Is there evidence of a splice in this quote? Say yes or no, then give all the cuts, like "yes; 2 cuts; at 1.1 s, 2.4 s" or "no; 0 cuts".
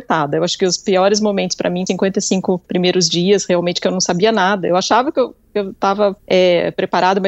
yes; 3 cuts; at 1.9 s, 2.6 s, 6.2 s